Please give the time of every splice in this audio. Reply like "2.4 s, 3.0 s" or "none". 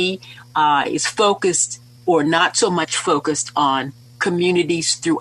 none

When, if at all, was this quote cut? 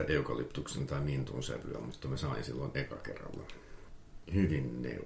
none

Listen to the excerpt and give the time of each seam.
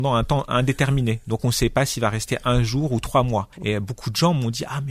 3.5 s

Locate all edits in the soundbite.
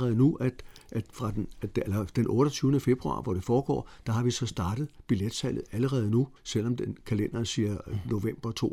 6.4 s

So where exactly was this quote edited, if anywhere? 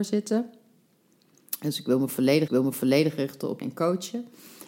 2.5 s, 3.6 s

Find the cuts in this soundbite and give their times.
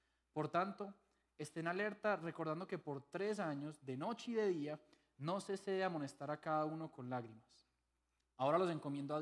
none

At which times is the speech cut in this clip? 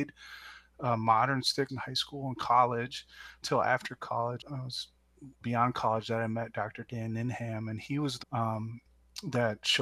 1.7 s, 3.4 s, 4.4 s, 5.4 s, 8.2 s

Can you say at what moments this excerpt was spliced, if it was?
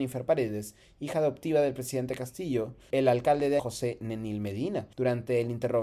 2.9 s, 3.6 s, 4.9 s

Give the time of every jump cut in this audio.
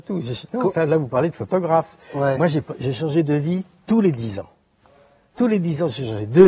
none

